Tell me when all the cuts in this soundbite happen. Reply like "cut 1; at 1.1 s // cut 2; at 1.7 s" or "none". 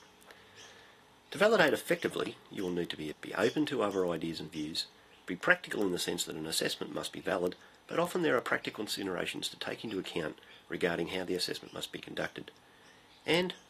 cut 1; at 3.1 s